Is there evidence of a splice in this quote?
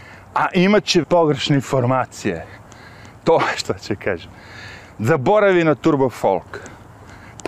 yes; 2 cuts; at 1.0 s, 3.5 s

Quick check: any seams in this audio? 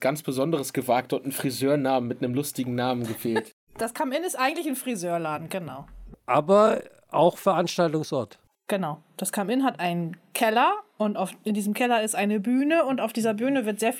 no; 0 cuts

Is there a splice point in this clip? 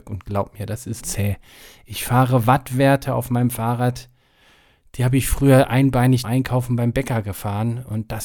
yes; 2 cuts; at 1.0 s, 6.2 s

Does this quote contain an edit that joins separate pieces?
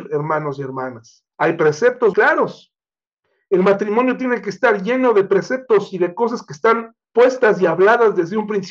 yes; 3 cuts; at 1.3 s, 2.1 s, 7.0 s

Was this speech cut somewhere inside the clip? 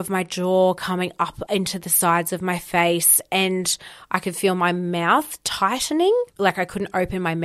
yes; 1 cut; at 6.3 s

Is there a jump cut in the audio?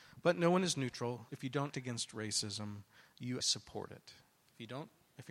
yes; 3 cuts; at 1.3 s, 1.7 s, 3.4 s

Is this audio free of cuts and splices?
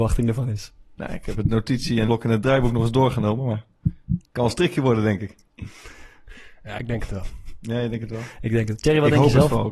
no; 2 cuts; at 2.1 s, 4.2 s

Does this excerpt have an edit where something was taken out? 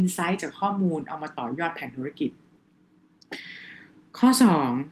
no; 0 cuts

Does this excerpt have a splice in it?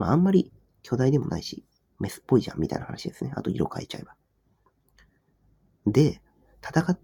no; 0 cuts

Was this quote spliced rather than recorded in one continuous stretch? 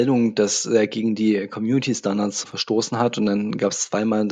no; 0 cuts

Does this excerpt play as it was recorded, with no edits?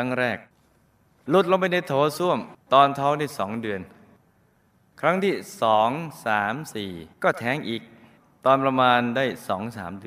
no; 2 cuts; at 2.6 s, 7.1 s

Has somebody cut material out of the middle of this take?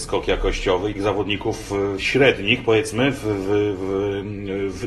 yes; 1 cut; at 0.9 s

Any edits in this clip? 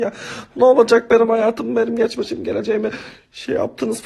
no; 0 cuts

